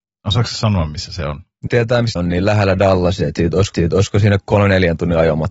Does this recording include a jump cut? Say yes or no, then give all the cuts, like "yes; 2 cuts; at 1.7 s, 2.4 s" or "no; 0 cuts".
yes; 3 cuts; at 1.7 s, 2.2 s, 3.7 s